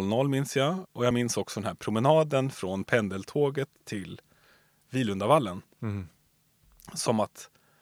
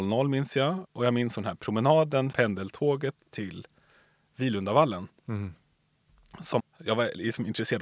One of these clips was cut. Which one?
second; 3 cuts; at 1.3 s, 2.3 s, 6.6 s

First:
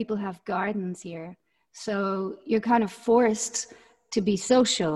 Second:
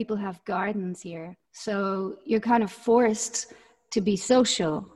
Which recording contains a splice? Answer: second; 1 cut; at 1.4 s

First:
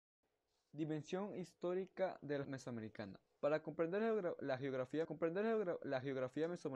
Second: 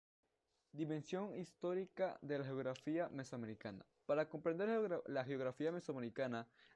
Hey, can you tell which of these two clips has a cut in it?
first; 2 cuts; at 2.4 s, 5.0 s

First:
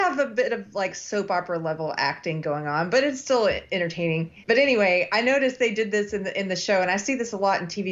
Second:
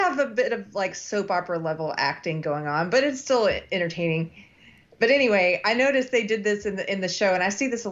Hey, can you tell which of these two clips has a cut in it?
first; 1 cut; at 4.4 s

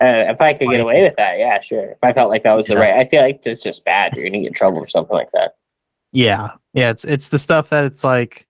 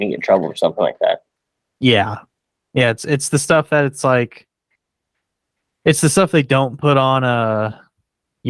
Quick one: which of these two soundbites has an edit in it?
first; 1 cut; at 6.7 s

